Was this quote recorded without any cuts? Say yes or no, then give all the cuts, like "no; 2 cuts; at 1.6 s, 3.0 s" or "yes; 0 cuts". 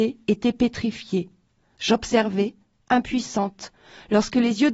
yes; 0 cuts